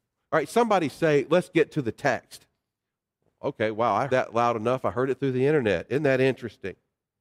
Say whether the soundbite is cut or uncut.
cut